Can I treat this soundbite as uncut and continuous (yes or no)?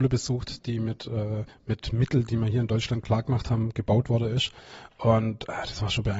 no